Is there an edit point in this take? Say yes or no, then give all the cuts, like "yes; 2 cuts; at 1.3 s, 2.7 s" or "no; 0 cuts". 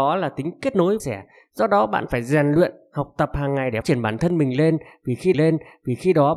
yes; 3 cuts; at 1.0 s, 3.8 s, 5.3 s